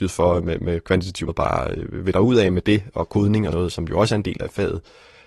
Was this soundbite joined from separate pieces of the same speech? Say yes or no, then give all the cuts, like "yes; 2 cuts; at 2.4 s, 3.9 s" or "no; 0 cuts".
yes; 3 cuts; at 1.3 s, 3.5 s, 4.4 s